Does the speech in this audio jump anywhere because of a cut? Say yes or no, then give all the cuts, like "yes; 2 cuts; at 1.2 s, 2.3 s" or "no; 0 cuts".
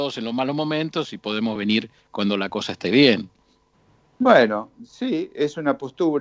no; 0 cuts